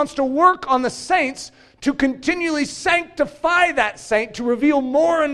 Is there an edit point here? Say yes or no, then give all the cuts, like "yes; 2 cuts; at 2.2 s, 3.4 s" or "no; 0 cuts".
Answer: no; 0 cuts